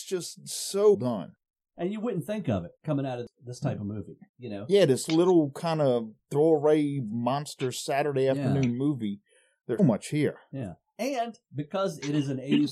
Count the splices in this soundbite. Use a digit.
4